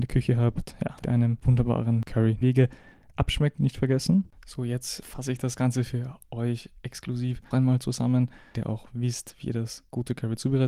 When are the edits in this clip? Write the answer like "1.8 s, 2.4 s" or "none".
1.0 s, 2.4 s, 3.6 s, 5.0 s, 7.5 s, 8.5 s